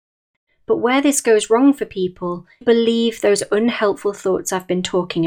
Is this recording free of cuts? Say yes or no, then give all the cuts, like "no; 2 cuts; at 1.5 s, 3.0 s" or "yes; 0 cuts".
no; 1 cut; at 2.6 s